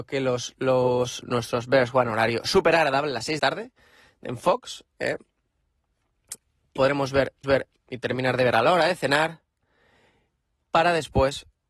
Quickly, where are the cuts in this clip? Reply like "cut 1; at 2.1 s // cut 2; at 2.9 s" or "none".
cut 1; at 1.2 s // cut 2; at 3.4 s // cut 3; at 6.8 s // cut 4; at 7.4 s